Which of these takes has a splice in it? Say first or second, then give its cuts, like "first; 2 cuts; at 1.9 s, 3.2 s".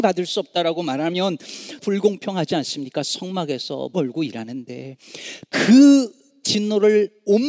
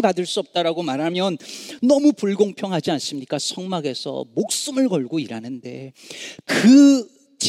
first; 2 cuts; at 1.8 s, 3.9 s